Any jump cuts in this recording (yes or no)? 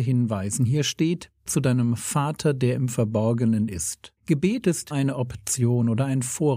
yes